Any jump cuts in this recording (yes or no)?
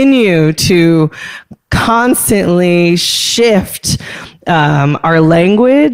no